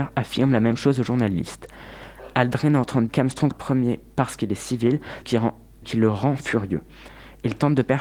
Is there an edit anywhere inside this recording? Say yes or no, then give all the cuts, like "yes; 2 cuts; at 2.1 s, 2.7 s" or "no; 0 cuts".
yes; 4 cuts; at 3.1 s, 3.5 s, 5.2 s, 5.8 s